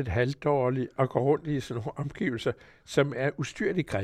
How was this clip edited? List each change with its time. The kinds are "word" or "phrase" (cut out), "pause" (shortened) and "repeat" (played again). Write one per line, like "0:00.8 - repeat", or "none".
none